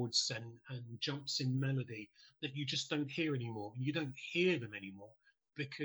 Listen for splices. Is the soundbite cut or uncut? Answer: uncut